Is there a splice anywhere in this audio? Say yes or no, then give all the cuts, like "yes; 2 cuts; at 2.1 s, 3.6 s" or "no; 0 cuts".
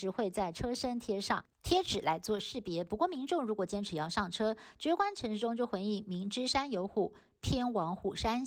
yes; 1 cut; at 1.5 s